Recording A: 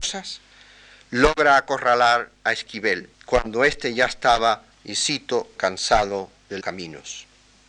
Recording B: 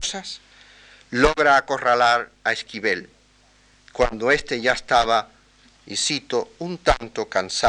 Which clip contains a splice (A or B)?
A